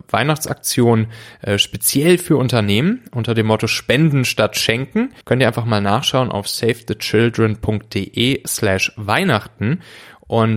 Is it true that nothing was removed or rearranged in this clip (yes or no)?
no